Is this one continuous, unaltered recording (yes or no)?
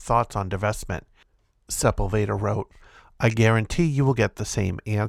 yes